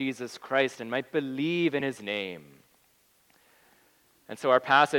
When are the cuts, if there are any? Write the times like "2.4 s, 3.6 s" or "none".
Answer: none